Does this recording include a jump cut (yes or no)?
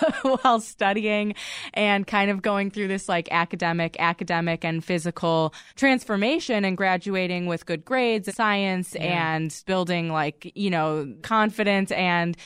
yes